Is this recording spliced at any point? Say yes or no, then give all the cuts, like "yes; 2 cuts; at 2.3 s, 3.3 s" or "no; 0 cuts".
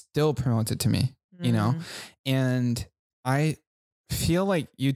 no; 0 cuts